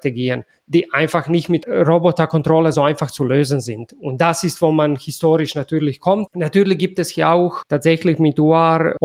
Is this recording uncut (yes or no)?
yes